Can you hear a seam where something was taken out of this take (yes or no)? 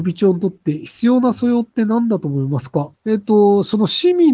yes